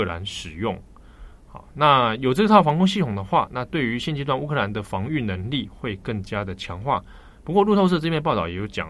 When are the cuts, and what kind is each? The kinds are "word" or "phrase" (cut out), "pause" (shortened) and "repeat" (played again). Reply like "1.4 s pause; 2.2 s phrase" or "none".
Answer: none